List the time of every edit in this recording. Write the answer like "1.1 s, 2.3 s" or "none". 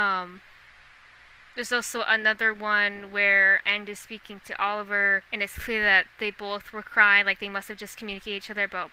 3.6 s, 5.3 s, 6.1 s